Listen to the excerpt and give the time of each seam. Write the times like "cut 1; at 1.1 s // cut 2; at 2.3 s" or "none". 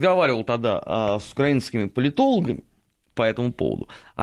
none